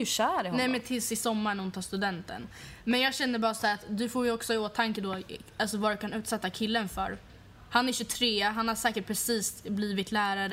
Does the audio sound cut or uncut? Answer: uncut